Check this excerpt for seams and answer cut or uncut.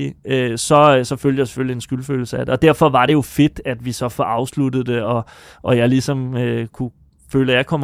uncut